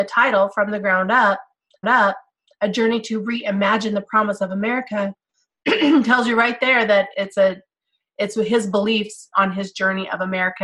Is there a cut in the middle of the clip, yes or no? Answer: yes